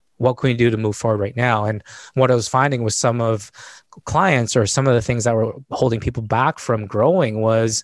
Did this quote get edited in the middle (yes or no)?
no